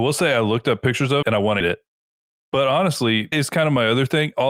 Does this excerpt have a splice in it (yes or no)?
yes